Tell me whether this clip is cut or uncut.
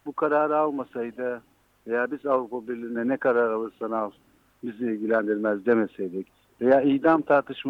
uncut